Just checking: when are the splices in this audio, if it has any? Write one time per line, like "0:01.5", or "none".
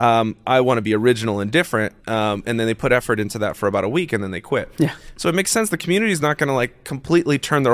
0:02.0